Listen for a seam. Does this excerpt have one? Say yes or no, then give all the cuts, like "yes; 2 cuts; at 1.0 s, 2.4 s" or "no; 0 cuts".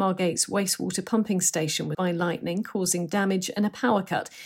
yes; 1 cut; at 1.9 s